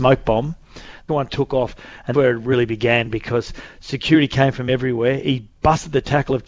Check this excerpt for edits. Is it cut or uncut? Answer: cut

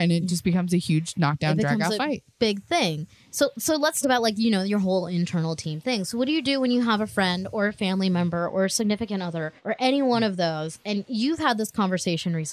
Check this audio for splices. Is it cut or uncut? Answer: cut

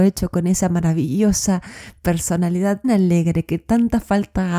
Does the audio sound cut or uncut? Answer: cut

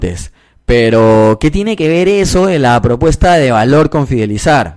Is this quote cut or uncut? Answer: uncut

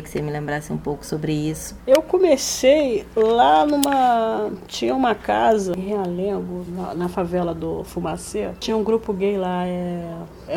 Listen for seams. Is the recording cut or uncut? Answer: uncut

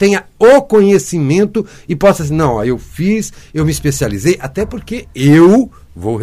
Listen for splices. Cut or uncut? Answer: uncut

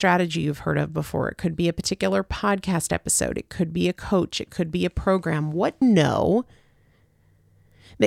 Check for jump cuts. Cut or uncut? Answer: cut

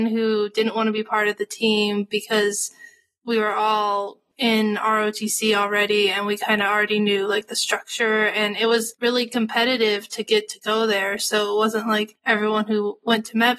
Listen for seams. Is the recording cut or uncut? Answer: uncut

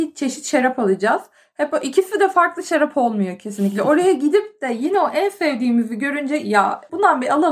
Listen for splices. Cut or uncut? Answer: uncut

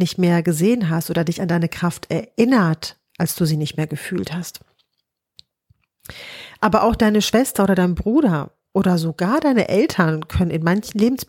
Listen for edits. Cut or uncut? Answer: uncut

